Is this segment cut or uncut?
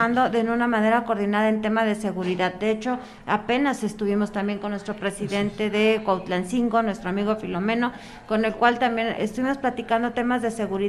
cut